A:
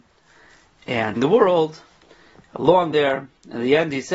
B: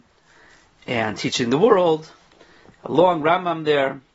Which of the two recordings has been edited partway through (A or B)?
A